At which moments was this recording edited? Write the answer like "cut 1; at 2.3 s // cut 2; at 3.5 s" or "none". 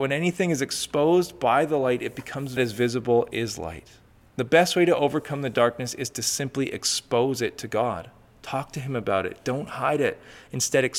cut 1; at 2.6 s // cut 2; at 4.1 s